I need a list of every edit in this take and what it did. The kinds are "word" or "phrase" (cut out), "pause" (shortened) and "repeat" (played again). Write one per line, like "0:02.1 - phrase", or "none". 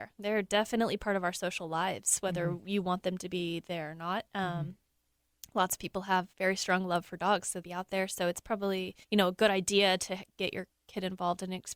0:06.3 - pause
0:07.6 - phrase
0:09.0 - pause